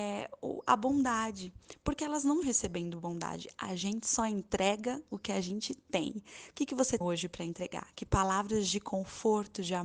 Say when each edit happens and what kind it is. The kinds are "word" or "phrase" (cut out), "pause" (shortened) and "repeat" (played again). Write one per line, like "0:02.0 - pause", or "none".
0:02.4 - word
0:07.0 - word